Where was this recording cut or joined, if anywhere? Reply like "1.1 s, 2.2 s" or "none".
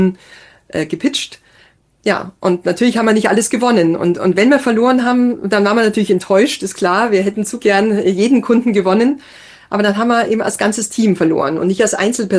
none